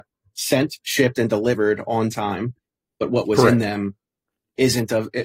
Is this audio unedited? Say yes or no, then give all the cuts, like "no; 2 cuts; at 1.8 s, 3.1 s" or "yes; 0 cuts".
yes; 0 cuts